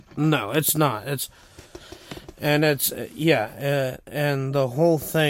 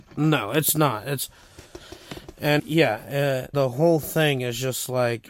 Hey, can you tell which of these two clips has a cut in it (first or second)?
second